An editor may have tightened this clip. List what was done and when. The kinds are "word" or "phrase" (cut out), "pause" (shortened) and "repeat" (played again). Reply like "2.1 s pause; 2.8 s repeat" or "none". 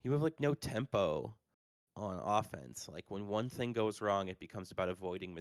none